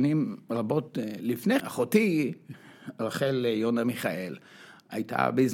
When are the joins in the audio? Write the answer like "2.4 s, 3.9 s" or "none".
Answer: 1.6 s